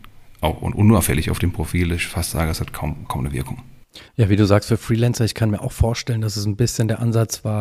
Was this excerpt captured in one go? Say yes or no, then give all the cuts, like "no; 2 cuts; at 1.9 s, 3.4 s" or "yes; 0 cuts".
no; 1 cut; at 4.1 s